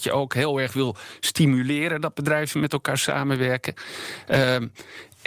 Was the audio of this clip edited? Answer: no; 0 cuts

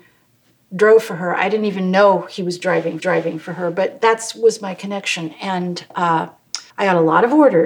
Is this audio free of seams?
no; 2 cuts; at 3.0 s, 6.7 s

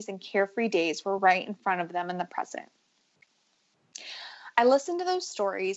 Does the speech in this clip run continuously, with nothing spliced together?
yes; 0 cuts

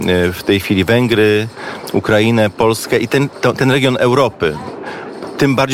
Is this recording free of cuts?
yes; 0 cuts

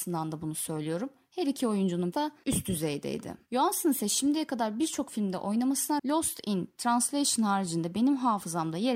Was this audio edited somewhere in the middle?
yes; 2 cuts; at 2.1 s, 6.0 s

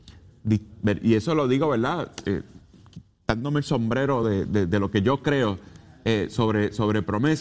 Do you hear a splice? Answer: no; 0 cuts

